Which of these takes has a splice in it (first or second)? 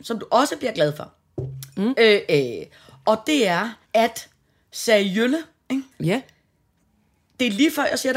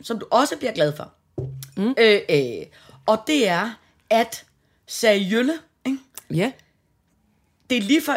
first